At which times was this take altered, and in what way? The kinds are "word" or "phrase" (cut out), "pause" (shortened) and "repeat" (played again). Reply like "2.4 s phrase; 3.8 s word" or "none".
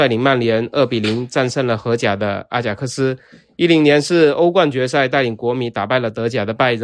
none